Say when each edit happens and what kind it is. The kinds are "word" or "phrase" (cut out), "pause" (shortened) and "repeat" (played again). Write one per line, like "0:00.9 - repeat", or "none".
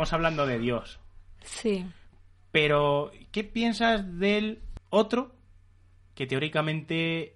none